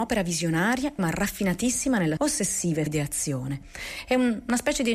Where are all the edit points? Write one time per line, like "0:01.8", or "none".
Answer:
0:01.0
0:02.2
0:02.9